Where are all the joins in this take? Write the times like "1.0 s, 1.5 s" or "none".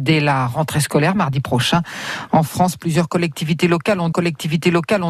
4.1 s